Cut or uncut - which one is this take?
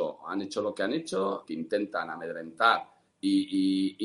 cut